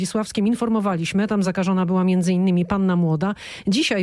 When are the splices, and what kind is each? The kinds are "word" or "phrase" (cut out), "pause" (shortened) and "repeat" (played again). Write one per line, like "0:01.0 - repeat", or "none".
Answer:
none